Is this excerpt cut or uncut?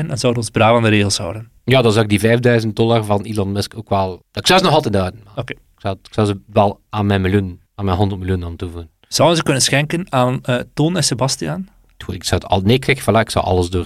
cut